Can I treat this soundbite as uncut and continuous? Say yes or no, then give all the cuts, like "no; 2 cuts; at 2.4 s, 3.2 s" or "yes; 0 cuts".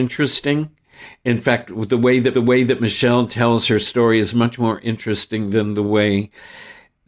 no; 1 cut; at 2.3 s